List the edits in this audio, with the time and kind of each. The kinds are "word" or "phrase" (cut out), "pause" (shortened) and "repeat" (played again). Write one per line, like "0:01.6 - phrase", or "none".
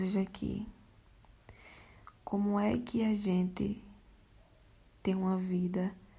none